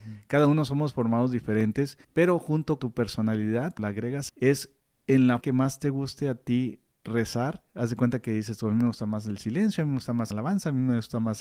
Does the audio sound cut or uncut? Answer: cut